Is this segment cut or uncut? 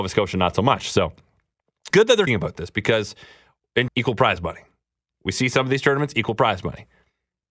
cut